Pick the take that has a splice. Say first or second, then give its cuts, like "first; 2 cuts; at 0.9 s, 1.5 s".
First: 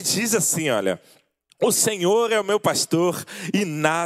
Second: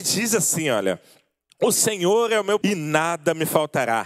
second; 1 cut; at 2.6 s